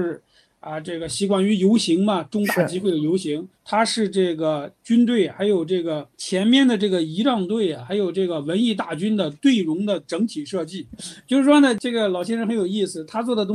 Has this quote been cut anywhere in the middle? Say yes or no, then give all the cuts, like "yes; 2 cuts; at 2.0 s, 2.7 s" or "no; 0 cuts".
yes; 3 cuts; at 3.5 s, 6.1 s, 11.0 s